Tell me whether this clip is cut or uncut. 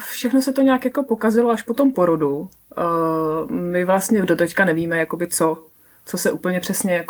uncut